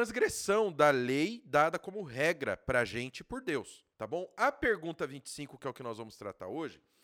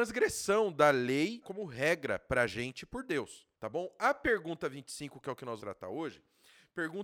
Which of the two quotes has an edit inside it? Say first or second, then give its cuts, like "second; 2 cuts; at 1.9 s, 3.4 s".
second; 2 cuts; at 1.4 s, 5.6 s